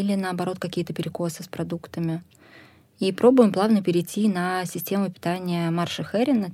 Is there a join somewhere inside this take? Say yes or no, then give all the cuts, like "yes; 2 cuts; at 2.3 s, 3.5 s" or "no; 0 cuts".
no; 0 cuts